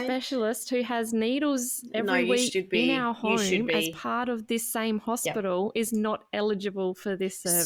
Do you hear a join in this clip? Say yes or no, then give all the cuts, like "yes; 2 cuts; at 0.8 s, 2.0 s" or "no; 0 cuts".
no; 0 cuts